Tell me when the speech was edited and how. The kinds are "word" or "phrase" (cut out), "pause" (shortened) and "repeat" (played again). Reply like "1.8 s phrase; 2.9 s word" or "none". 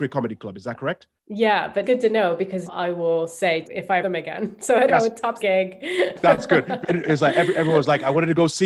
1.2 s pause; 1.8 s word; 2.7 s word; 3.6 s phrase; 4.0 s phrase; 4.9 s word; 5.4 s word; 6.8 s word